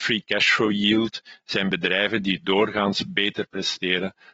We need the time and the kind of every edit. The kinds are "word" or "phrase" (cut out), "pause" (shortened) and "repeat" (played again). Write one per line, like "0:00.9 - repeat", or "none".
none

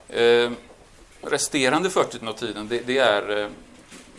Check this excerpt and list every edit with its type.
0:01.2 - word
0:02.2 - word

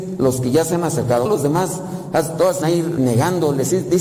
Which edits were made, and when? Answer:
0:01.3 - word
0:02.6 - word
0:03.0 - word

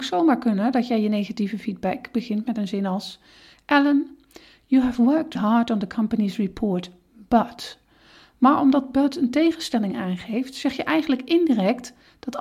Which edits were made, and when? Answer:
0:05.3 - word

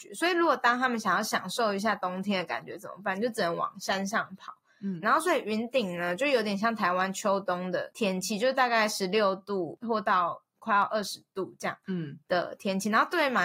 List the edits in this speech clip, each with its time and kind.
0:05.0 - word

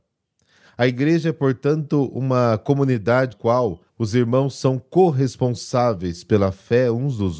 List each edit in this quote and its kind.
0:03.3 - word
0:03.9 - pause

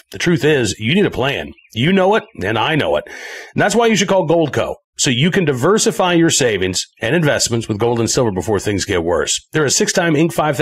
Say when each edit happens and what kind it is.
0:06.9 - pause

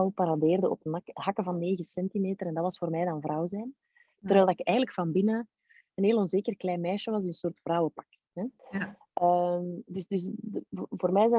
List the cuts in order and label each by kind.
0:08.6 - pause

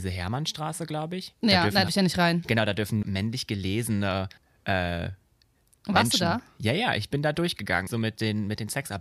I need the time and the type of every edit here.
0:01.9 - word
0:03.0 - word
0:04.4 - pause
0:07.9 - phrase

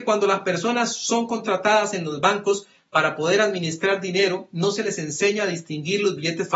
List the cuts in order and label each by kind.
none

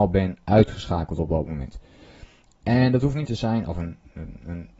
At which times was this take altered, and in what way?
0:03.3 - phrase

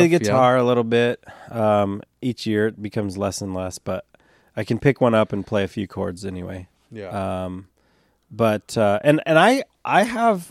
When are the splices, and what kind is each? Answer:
none

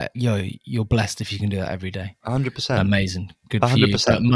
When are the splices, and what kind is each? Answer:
none

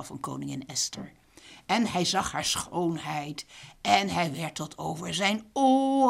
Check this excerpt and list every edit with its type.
none

